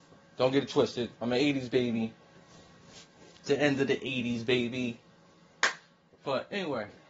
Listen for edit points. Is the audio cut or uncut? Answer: cut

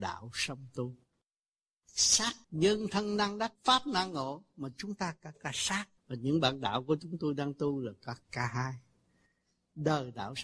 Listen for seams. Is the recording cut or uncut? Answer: cut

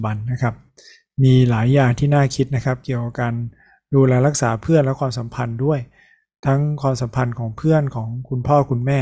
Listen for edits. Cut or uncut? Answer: uncut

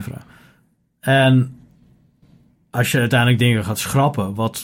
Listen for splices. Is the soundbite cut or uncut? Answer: uncut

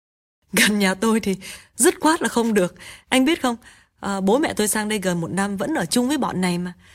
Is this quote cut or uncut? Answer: uncut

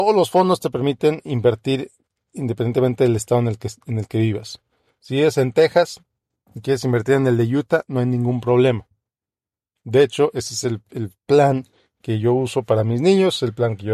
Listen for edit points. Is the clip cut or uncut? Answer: uncut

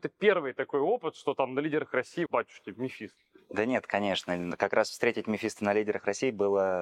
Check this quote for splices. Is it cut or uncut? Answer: cut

